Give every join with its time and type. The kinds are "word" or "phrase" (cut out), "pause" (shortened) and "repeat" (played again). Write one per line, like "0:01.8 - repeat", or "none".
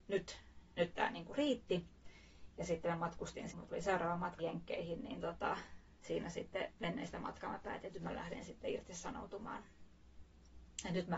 0:03.5 - word
0:04.4 - word